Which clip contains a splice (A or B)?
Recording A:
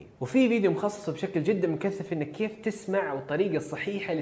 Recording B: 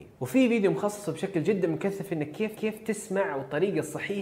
B